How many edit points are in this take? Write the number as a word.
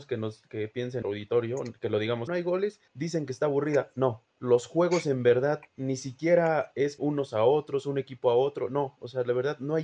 six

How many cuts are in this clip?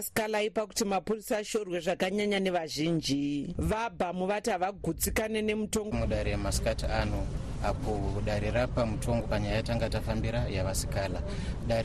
two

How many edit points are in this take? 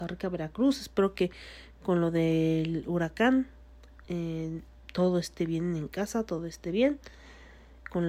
zero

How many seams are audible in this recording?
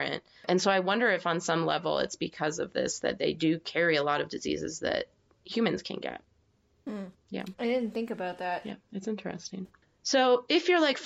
one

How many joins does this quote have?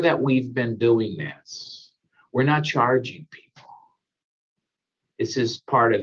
zero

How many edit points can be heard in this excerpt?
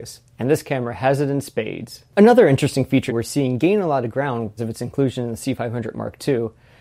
two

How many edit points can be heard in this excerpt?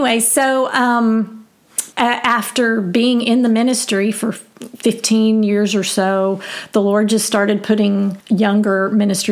two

